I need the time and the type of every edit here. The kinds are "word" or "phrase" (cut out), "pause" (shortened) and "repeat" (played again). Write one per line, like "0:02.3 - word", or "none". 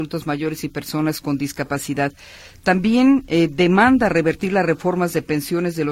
none